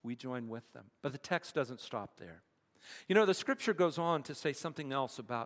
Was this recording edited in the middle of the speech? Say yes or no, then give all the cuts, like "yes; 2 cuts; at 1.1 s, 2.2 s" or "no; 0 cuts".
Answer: yes; 1 cut; at 1.0 s